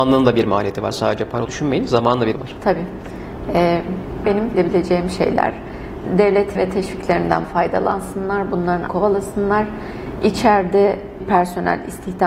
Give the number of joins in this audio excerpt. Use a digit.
8